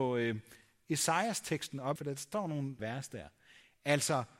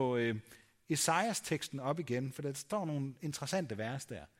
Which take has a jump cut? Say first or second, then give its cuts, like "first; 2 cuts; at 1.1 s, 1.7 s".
first; 2 cuts; at 2.0 s, 2.8 s